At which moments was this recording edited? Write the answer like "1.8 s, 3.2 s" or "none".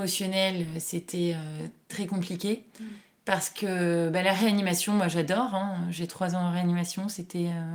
1.9 s, 6.1 s